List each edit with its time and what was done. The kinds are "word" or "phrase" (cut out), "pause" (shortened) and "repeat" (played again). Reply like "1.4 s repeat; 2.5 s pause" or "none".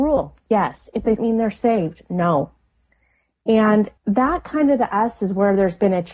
1.2 s phrase; 4.0 s pause